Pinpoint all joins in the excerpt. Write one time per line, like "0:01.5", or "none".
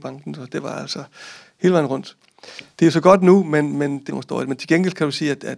0:04.1